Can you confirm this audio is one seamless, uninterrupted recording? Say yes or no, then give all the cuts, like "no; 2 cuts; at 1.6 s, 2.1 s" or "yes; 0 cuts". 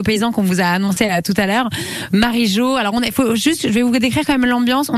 yes; 0 cuts